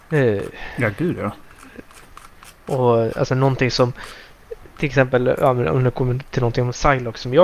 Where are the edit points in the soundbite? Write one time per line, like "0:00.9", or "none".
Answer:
none